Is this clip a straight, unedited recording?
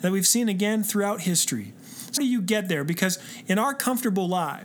no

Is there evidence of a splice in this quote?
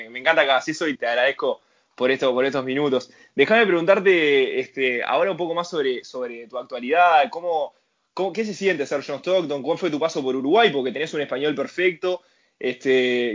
yes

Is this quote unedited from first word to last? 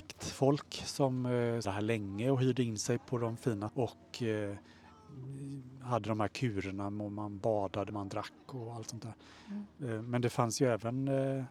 no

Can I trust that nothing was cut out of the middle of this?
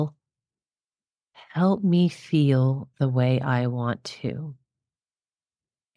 yes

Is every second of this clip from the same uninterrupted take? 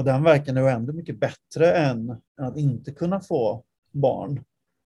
no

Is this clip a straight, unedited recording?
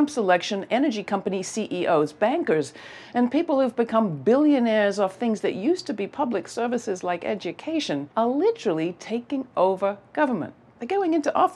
no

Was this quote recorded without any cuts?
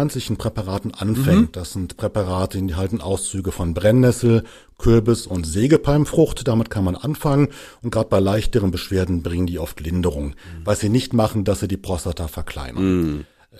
yes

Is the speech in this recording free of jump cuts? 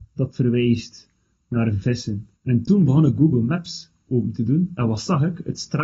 no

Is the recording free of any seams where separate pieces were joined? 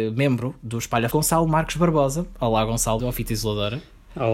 no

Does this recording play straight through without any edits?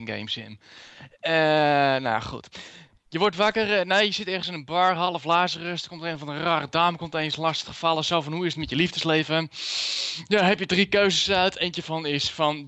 yes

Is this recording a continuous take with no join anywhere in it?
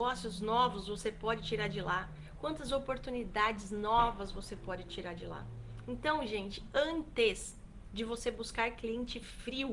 yes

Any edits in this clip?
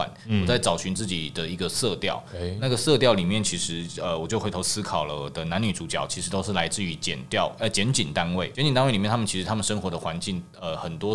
yes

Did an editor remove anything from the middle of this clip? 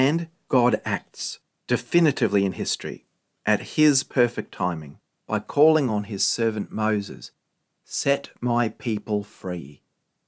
no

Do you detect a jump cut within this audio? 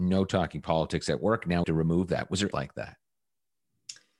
yes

